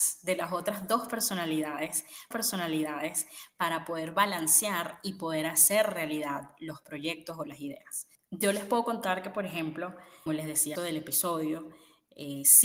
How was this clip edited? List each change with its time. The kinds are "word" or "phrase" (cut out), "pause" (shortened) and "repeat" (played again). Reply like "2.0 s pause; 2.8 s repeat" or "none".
2.3 s repeat; 10.3 s phrase; 10.8 s phrase